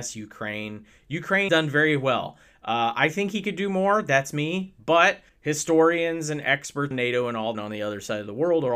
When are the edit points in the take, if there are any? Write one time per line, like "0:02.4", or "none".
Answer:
0:01.5
0:05.3
0:06.9
0:07.5

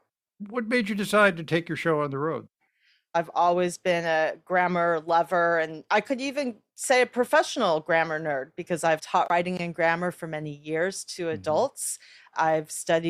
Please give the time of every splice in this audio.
none

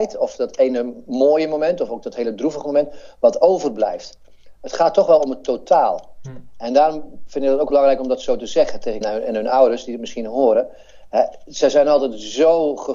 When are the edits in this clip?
0:07.7
0:09.0

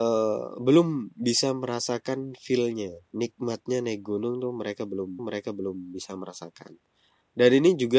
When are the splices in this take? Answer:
0:05.2

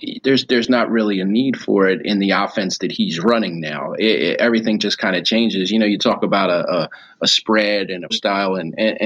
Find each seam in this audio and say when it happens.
0:08.1

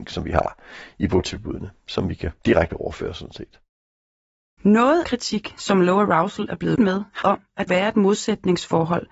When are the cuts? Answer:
0:02.4
0:05.0
0:06.8
0:07.2
0:07.7

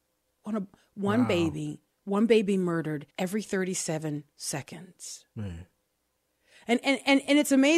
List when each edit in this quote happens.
0:01.9
0:03.1
0:04.3
0:06.8

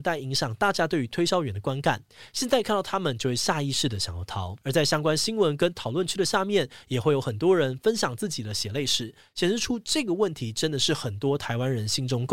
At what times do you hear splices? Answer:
0:04.6

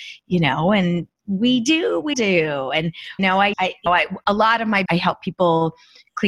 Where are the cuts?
0:02.1
0:03.2
0:03.5
0:03.9
0:04.8

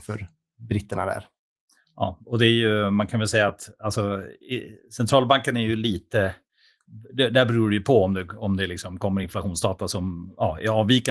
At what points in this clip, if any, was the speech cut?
none

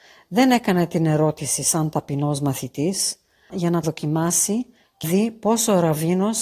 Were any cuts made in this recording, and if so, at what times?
0:03.5
0:03.8
0:05.0

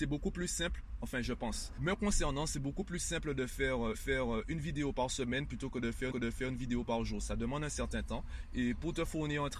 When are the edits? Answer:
0:03.9
0:06.1

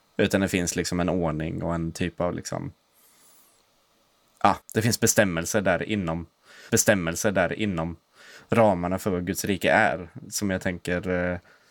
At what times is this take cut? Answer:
0:04.6
0:06.7

